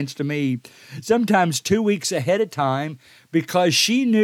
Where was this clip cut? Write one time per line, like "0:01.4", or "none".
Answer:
none

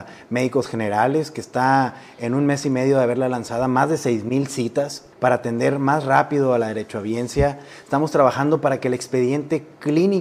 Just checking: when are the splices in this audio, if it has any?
0:05.1

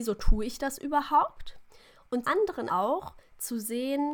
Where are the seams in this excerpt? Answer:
0:02.2
0:02.7

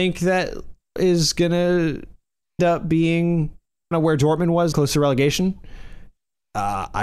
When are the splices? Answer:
0:01.0
0:02.6
0:03.9
0:04.7

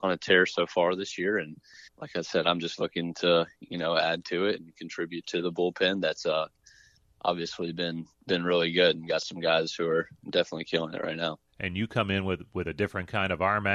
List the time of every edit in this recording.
0:01.9
0:08.1
0:11.5

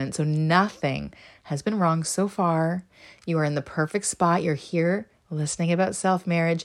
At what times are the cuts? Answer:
none

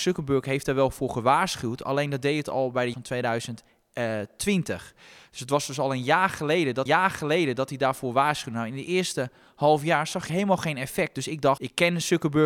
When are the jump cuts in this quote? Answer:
0:02.9
0:06.9
0:10.3
0:11.6

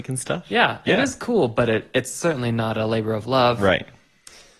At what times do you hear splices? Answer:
none

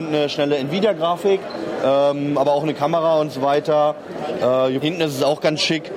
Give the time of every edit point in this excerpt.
0:04.8

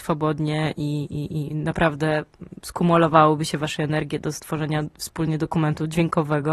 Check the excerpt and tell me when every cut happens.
0:02.6

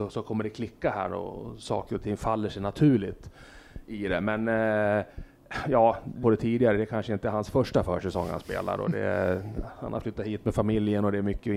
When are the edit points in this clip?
0:06.2

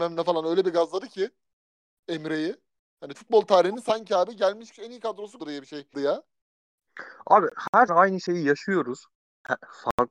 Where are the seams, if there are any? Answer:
0:03.1
0:04.7
0:05.4
0:05.9
0:07.9

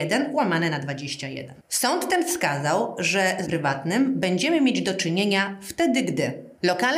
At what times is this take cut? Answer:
0:03.4

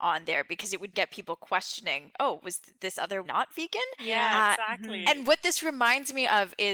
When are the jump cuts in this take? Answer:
0:00.9
0:02.1
0:03.2

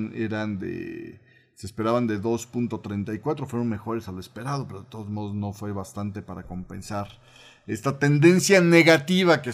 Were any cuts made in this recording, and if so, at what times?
none

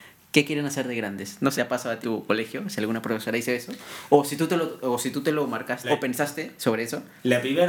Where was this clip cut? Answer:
0:01.6
0:02.0
0:05.8

